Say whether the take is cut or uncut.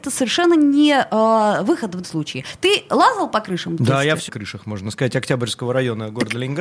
cut